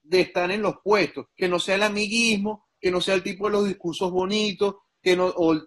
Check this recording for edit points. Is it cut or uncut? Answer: cut